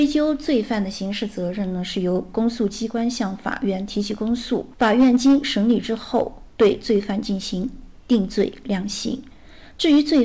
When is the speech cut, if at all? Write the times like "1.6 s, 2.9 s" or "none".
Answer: 4.7 s